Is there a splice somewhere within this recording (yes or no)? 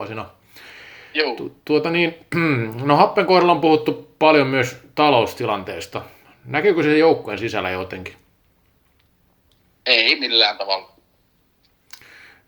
no